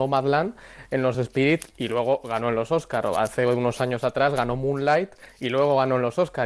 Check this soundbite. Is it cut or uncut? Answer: uncut